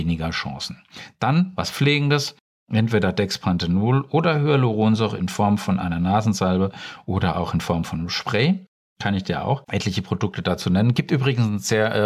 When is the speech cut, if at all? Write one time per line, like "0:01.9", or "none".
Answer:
none